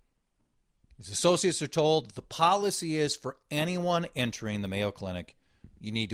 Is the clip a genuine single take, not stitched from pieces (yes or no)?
yes